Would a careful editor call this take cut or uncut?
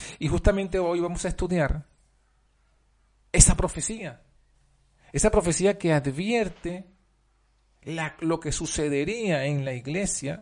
uncut